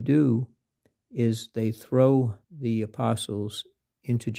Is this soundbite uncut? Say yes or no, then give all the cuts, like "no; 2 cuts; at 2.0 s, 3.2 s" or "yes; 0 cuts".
no; 1 cut; at 2.4 s